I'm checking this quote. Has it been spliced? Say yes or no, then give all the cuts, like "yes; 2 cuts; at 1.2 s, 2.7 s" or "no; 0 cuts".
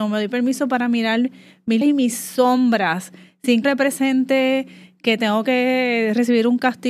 yes; 2 cuts; at 1.8 s, 3.6 s